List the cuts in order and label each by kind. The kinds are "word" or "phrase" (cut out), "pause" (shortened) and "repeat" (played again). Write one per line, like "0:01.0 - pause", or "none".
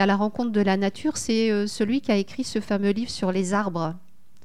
none